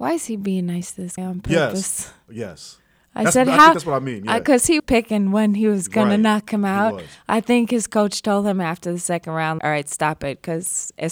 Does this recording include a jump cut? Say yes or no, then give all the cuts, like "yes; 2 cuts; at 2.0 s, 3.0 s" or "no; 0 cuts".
yes; 3 cuts; at 1.2 s, 4.8 s, 9.6 s